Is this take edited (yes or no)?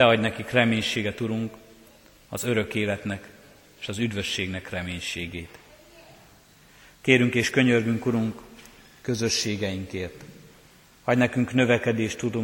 no